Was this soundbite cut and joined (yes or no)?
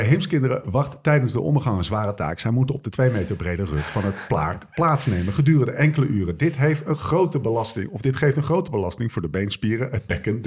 no